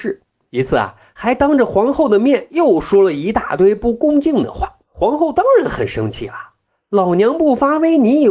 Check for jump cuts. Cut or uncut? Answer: cut